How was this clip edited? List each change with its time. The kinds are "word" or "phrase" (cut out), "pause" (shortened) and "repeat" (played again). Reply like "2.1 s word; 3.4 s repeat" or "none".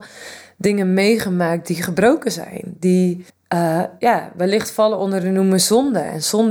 3.3 s pause